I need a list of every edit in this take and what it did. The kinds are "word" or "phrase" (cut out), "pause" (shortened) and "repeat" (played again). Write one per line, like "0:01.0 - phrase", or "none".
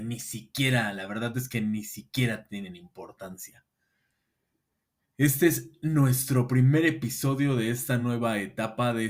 none

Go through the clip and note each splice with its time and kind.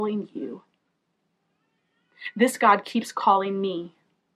none

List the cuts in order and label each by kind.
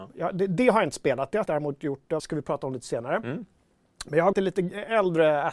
0:01.5 - word
0:02.2 - word
0:04.3 - phrase

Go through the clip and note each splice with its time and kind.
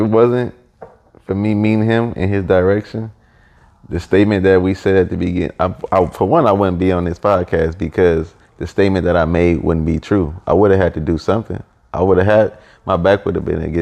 none

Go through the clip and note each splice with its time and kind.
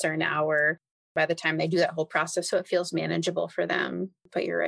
none

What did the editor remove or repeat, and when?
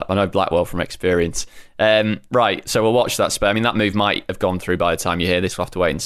none

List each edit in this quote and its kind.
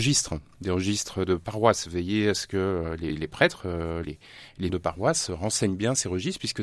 0:04.0 - word
0:04.7 - word

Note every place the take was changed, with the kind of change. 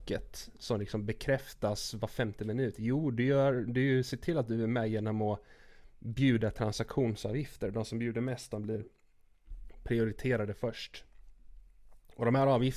none

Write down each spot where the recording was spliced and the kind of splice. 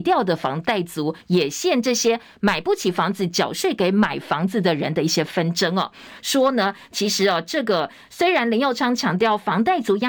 0:01.2 - pause

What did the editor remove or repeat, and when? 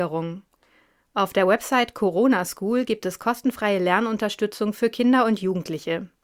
none

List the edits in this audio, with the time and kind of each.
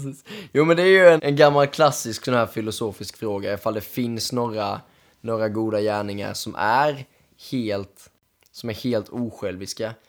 0:01.2 - word

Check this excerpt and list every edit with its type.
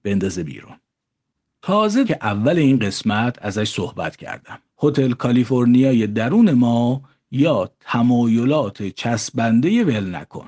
0:02.0 - phrase
0:04.7 - pause

